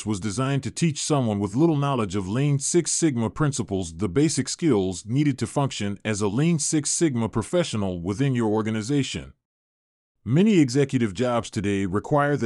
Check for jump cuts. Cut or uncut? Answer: uncut